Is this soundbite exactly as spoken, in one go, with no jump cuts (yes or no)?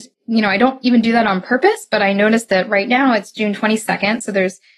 yes